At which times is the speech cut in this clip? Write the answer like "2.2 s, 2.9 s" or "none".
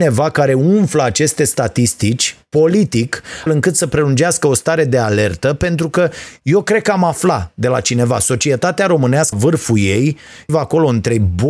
3.5 s, 9.3 s, 10.5 s